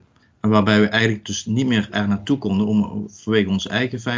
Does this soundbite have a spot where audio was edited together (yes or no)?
no